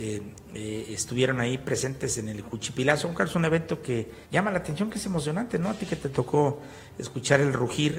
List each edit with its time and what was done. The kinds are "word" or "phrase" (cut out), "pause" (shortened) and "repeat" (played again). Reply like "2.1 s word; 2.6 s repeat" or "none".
4.2 s pause